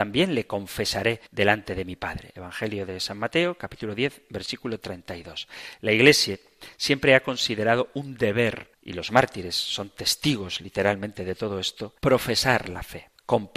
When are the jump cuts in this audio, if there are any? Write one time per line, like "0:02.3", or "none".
0:01.3
0:08.7
0:12.0